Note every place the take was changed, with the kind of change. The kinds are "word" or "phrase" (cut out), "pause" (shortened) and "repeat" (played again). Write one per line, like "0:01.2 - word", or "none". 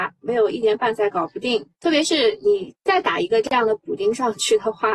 0:01.7 - pause